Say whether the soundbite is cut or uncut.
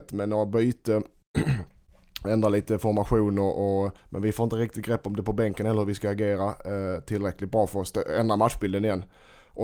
cut